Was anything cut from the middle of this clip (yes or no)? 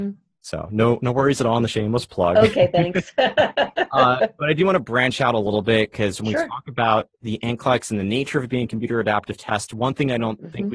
yes